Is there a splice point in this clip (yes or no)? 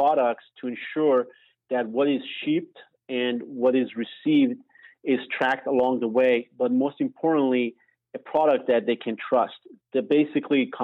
no